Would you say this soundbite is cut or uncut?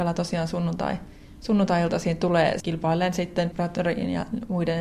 cut